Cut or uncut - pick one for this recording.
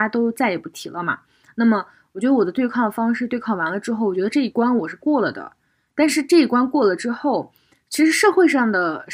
uncut